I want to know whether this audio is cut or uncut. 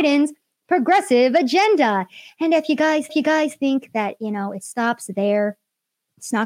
cut